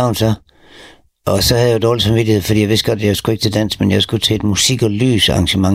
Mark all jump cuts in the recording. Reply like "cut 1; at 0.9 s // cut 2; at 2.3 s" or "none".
none